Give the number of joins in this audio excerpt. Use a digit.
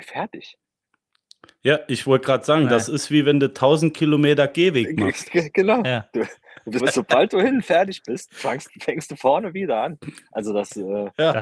2